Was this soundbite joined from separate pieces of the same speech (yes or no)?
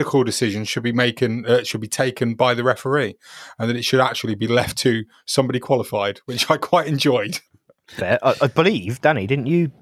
yes